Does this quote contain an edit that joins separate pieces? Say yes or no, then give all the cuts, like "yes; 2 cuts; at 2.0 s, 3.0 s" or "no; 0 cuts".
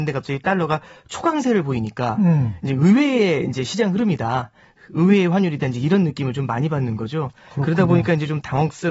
no; 0 cuts